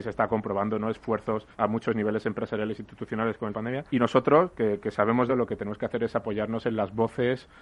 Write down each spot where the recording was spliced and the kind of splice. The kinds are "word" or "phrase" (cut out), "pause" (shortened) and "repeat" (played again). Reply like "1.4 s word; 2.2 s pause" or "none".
1.5 s pause; 3.5 s phrase; 3.9 s pause; 5.3 s phrase